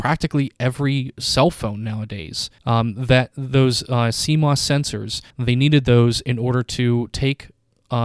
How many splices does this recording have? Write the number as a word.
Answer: two